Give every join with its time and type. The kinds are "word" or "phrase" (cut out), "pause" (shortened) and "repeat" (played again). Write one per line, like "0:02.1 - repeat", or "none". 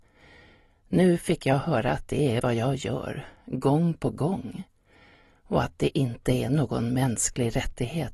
0:02.4 - word